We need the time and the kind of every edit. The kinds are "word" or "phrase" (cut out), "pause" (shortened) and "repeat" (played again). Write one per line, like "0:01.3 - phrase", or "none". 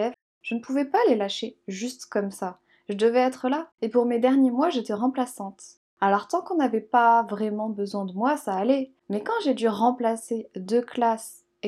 0:03.7 - pause
0:05.9 - pause
0:09.0 - pause